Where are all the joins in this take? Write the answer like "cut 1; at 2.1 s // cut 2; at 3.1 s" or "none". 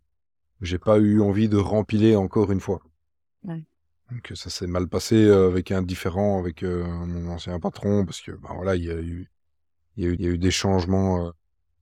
cut 1; at 3.9 s // cut 2; at 10.2 s